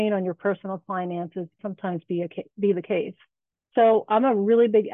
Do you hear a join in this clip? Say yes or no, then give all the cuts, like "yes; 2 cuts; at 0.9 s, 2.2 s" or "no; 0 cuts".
yes; 1 cut; at 1.6 s